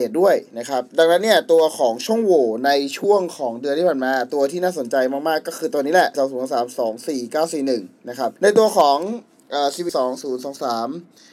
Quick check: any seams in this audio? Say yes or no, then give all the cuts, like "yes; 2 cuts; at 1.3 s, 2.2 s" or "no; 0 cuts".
yes; 3 cuts; at 6.1 s, 8.4 s, 9.9 s